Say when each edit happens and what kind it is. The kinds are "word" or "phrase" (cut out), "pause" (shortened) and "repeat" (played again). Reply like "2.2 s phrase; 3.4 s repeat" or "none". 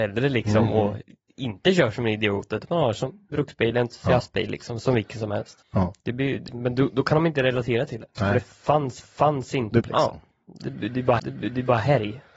3.3 s word; 5.6 s pause; 6.5 s word; 9.0 s repeat; 9.8 s phrase; 11.2 s repeat